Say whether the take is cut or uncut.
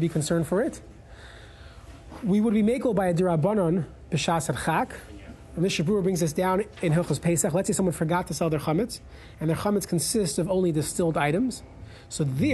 uncut